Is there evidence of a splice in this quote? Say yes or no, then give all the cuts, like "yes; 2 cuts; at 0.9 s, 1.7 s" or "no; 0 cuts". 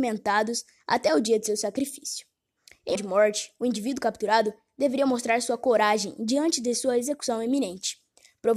yes; 1 cut; at 3.0 s